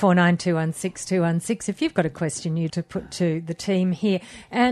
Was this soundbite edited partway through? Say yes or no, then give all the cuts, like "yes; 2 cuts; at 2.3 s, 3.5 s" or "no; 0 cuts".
yes; 1 cut; at 2.7 s